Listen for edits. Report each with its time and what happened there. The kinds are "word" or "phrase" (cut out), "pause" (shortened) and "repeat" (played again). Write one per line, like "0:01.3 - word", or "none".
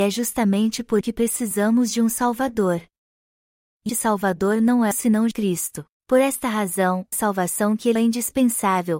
0:01.0 - word
0:03.9 - word
0:04.9 - word
0:05.3 - word
0:05.9 - pause
0:07.1 - phrase
0:08.0 - word